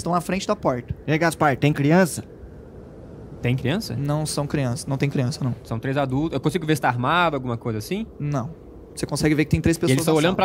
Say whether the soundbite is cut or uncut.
uncut